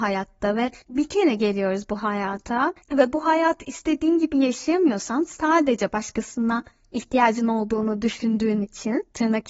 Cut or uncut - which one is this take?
uncut